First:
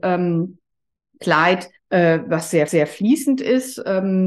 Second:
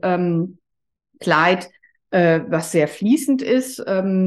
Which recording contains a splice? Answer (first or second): first